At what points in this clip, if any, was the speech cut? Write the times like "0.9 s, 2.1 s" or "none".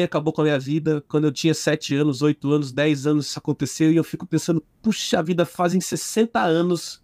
none